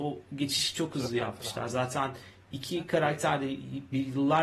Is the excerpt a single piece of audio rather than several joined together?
yes; 0 cuts

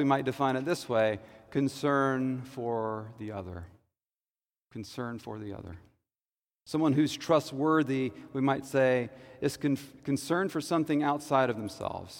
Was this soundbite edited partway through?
no; 0 cuts

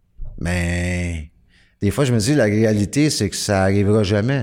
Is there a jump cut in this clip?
no; 0 cuts

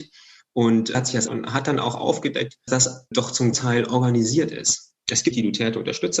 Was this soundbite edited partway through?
yes; 6 cuts; at 0.9 s, 1.3 s, 2.7 s, 3.1 s, 3.5 s, 5.3 s

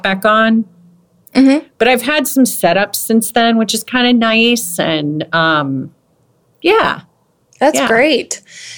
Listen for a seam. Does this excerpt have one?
no; 0 cuts

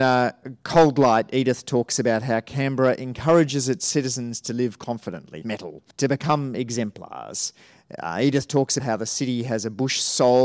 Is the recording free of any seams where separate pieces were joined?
no; 3 cuts; at 5.4 s, 5.9 s, 8.8 s

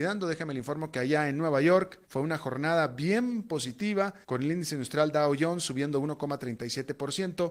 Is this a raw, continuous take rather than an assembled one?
no; 2 cuts; at 2.0 s, 4.2 s

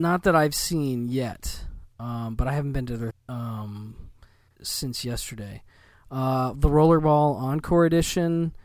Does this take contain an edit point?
yes; 2 cuts; at 3.1 s, 4.6 s

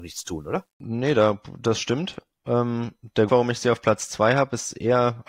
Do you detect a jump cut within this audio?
yes; 1 cut; at 3.3 s

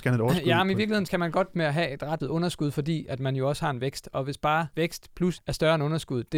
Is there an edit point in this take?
yes; 5 cuts; at 1.1 s, 1.5 s, 2.2 s, 4.7 s, 5.4 s

